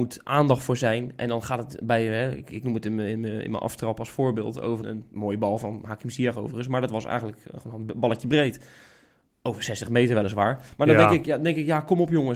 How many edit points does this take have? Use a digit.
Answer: 1